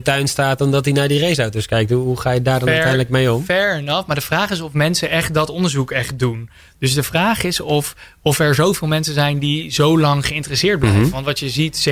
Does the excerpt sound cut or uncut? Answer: uncut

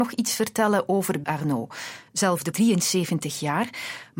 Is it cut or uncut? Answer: cut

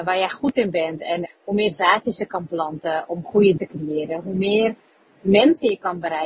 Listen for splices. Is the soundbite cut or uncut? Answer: cut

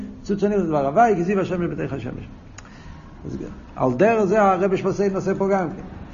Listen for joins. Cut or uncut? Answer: uncut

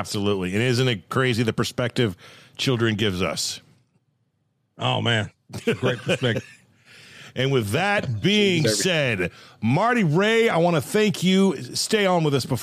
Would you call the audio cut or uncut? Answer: uncut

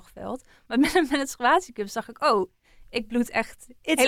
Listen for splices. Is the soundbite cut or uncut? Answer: uncut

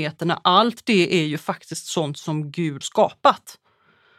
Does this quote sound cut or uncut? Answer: cut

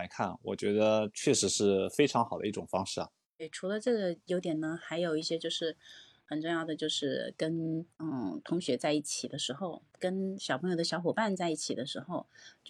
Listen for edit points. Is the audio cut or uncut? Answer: cut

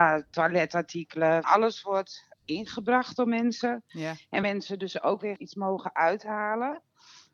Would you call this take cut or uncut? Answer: cut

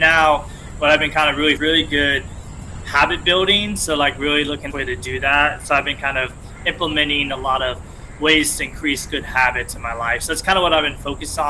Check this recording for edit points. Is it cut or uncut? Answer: cut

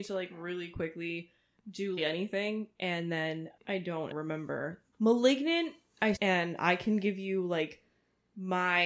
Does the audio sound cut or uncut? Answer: cut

